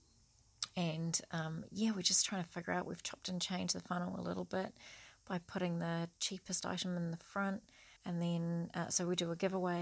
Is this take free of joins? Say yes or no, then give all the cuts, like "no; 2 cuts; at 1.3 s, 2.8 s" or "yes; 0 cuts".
no; 1 cut; at 8.0 s